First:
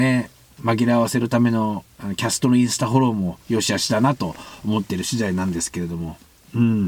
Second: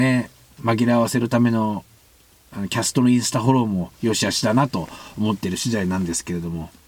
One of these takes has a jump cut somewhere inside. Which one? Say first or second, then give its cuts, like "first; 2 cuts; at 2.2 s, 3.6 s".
first; 1 cut; at 1.9 s